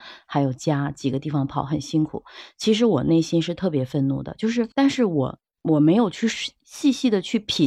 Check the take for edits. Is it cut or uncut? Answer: cut